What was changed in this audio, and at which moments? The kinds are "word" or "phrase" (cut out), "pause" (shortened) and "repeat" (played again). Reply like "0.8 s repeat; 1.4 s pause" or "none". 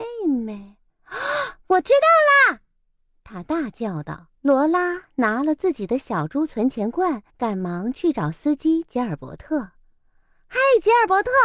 1.6 s pause; 4.4 s pause; 7.3 s pause

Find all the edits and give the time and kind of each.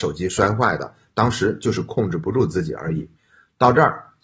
3.2 s pause

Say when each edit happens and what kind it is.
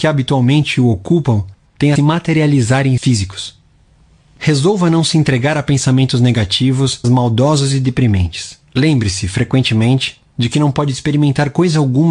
2.0 s phrase; 3.0 s word; 7.0 s word; 8.7 s pause

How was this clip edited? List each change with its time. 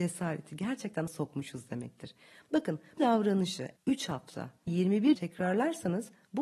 1.1 s word; 3.0 s word; 3.8 s word; 4.7 s word; 5.1 s word

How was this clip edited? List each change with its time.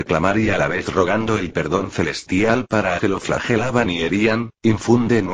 3.0 s word

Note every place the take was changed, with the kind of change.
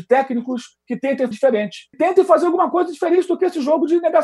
1.3 s word; 1.9 s word

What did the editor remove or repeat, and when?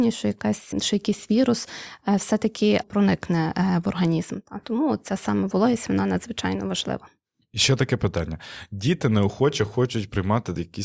2.8 s word

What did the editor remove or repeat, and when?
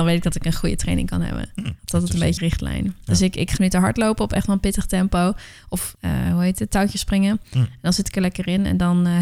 1.8 s pause; 2.4 s word; 3.6 s phrase

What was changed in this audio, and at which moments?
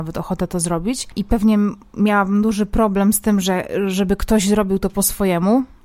none

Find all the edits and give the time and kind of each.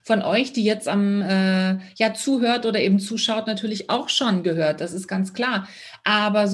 none

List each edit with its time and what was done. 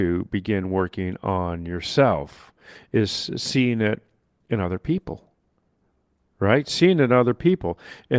none

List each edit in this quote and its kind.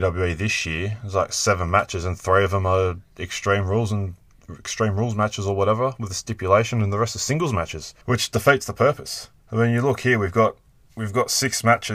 8.0 s pause; 9.4 s pause

